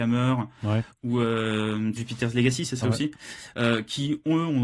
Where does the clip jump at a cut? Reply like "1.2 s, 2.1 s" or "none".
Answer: 2.0 s, 2.8 s